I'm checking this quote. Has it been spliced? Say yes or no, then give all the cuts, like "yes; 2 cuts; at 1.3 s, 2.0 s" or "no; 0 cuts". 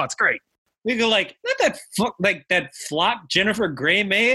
yes; 1 cut; at 1.4 s